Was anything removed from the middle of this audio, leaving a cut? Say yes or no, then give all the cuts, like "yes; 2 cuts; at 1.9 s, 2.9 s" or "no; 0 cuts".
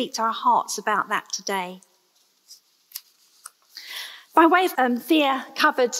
yes; 1 cut; at 4.7 s